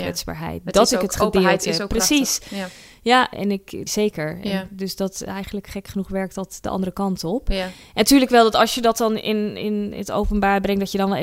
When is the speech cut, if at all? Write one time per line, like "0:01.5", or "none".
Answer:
0:03.3
0:03.9